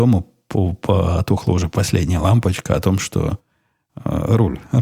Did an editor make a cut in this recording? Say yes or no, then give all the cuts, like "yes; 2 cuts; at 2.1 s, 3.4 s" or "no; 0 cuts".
no; 0 cuts